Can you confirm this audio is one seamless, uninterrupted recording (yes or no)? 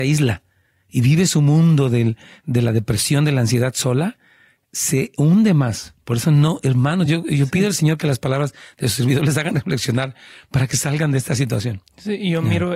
yes